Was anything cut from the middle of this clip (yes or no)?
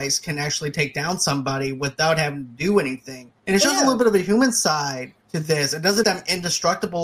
yes